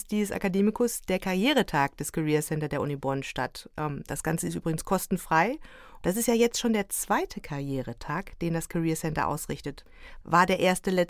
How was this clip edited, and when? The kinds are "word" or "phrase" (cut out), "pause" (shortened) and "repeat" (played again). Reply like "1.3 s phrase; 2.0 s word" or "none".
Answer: none